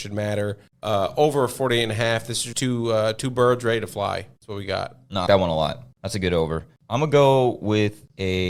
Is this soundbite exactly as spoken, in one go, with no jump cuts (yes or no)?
no